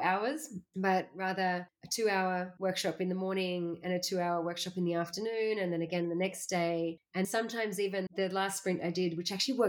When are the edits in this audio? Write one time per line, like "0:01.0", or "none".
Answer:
0:07.2
0:08.1